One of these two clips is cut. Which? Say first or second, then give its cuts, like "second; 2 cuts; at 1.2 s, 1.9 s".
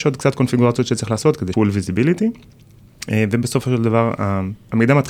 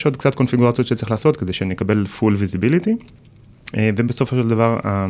first; 1 cut; at 1.5 s